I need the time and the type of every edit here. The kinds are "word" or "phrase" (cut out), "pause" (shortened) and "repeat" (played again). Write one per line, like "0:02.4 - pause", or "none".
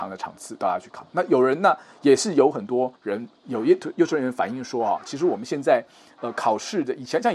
0:03.0 - pause